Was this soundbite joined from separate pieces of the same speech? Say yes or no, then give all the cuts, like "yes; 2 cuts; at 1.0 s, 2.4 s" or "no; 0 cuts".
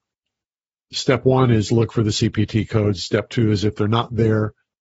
no; 0 cuts